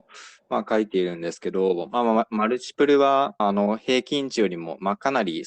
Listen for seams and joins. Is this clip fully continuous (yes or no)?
no